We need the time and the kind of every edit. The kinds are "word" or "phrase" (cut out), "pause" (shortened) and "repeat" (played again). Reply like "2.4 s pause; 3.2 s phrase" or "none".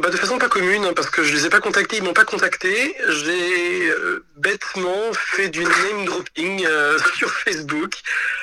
none